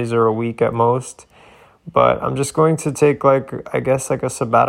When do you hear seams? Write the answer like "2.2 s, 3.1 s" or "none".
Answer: none